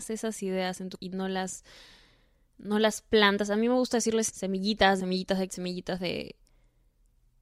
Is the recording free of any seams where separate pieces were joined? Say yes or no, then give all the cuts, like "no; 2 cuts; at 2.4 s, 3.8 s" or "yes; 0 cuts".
no; 4 cuts; at 1.0 s, 4.3 s, 5.0 s, 5.5 s